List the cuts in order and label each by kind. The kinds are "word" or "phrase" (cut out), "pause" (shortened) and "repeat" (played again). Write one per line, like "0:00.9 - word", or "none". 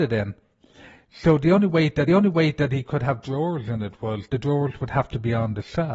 0:02.1 - repeat
0:04.3 - word